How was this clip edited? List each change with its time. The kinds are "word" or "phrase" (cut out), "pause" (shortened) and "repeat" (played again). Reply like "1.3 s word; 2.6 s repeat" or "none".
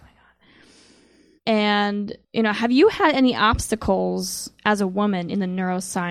2.2 s pause